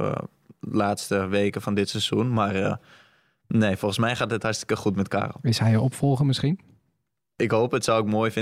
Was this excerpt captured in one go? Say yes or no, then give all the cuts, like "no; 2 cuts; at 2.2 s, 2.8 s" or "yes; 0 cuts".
yes; 0 cuts